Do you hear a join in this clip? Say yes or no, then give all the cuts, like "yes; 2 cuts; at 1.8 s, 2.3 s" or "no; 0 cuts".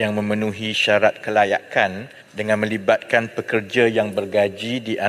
yes; 1 cut; at 2.2 s